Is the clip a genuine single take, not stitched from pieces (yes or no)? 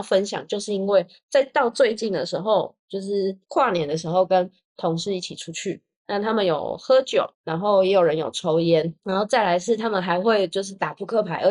no